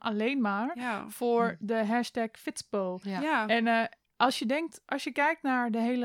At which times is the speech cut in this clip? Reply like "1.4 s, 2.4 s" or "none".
none